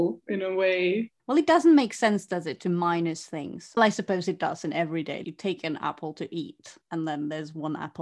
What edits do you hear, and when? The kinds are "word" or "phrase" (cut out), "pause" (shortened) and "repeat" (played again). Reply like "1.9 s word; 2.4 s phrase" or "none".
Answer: 1.2 s pause; 3.8 s word; 5.2 s word; 6.8 s pause